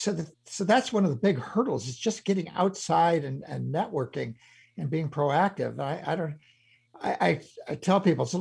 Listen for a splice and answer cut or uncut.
uncut